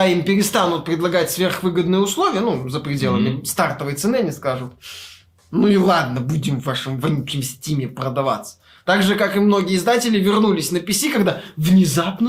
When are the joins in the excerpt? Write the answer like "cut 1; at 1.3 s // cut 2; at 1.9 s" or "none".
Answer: none